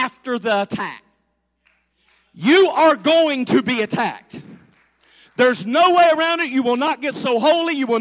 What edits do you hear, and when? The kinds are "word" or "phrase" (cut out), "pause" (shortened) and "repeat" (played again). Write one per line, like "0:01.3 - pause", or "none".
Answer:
none